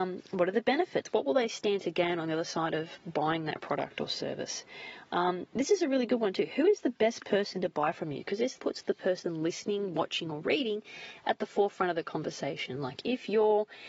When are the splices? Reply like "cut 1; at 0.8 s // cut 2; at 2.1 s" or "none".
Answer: cut 1; at 8.6 s